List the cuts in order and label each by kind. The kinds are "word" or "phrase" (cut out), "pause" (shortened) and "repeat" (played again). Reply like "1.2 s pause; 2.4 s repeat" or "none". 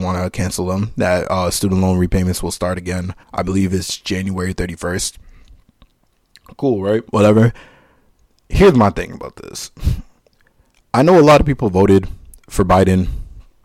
3.2 s pause; 7.1 s pause